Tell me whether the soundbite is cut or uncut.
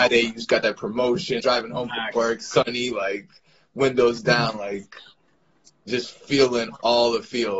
cut